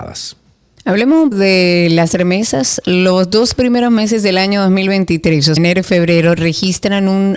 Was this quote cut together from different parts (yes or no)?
yes